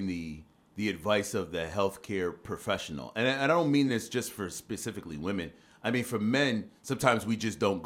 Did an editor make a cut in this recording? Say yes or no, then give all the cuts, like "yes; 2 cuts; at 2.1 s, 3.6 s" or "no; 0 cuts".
no; 0 cuts